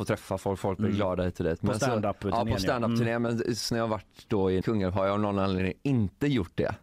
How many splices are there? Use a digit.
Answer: 2